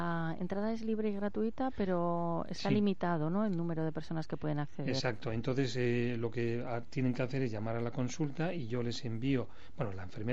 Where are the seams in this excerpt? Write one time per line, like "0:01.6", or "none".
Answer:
none